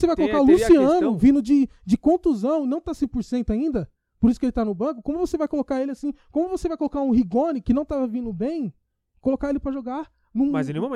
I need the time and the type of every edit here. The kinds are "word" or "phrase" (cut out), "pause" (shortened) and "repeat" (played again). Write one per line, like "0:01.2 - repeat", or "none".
none